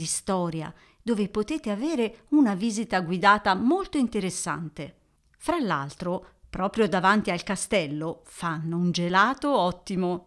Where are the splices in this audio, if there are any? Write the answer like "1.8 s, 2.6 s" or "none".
none